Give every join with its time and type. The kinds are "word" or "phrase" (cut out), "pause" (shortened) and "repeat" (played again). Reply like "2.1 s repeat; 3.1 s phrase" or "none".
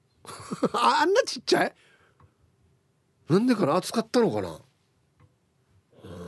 none